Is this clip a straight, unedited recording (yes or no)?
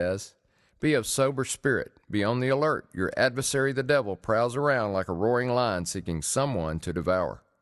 no